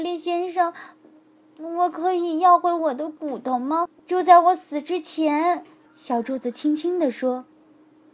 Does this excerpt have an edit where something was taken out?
no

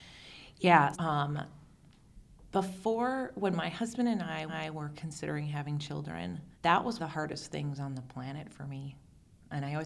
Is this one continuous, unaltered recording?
no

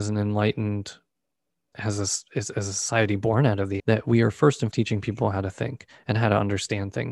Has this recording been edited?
yes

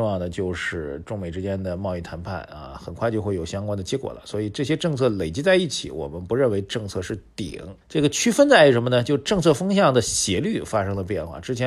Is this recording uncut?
no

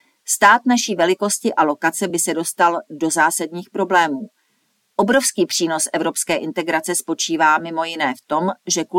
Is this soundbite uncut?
yes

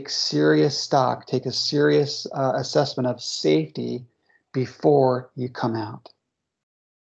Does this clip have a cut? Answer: no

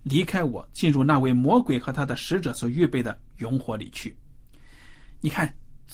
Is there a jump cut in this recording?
no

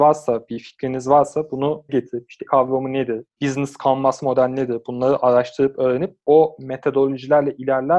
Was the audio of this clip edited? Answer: yes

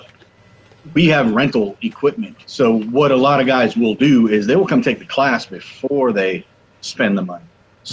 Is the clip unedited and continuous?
no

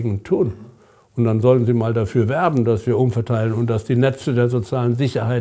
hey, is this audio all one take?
yes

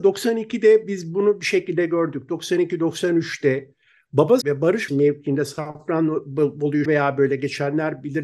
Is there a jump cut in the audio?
yes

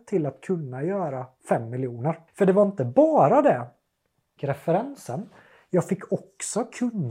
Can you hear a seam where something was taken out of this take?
yes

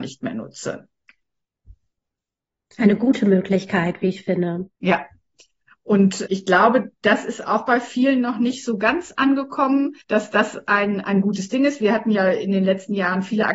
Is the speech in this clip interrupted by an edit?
yes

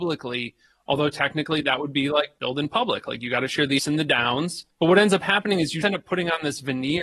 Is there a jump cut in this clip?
yes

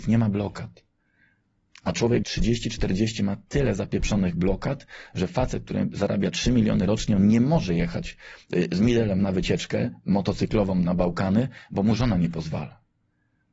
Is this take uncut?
no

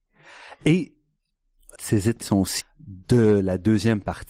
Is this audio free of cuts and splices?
no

